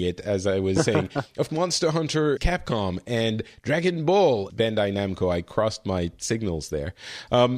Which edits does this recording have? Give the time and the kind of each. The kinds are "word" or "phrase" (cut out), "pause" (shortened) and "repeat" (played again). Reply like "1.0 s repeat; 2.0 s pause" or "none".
1.5 s word; 2.4 s word; 4.5 s word